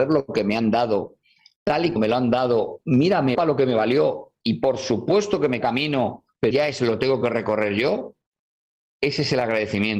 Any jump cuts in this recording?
yes; 5 cuts; at 2.0 s, 2.8 s, 3.3 s, 5.6 s, 6.5 s

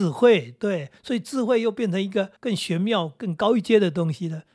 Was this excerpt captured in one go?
no; 2 cuts; at 1.0 s, 2.4 s

